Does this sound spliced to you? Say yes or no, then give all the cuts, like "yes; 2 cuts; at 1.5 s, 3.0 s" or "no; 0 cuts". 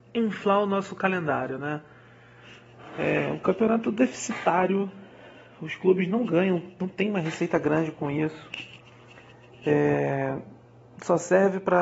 no; 0 cuts